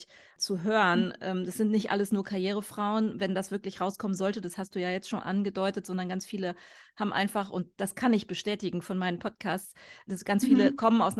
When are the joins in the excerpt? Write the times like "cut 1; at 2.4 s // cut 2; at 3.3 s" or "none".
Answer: cut 1; at 10.1 s